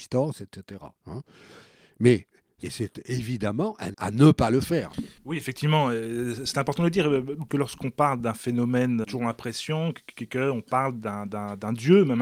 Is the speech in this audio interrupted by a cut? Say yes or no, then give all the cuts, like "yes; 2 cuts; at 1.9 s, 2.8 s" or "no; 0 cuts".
yes; 6 cuts; at 1.0 s, 2.6 s, 3.9 s, 5.2 s, 7.5 s, 9.0 s